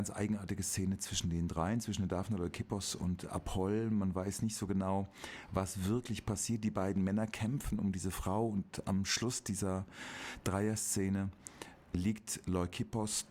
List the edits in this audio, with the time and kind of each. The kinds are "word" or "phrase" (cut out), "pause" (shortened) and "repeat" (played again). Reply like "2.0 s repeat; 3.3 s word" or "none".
11.8 s pause